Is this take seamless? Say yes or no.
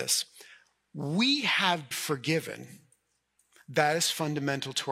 no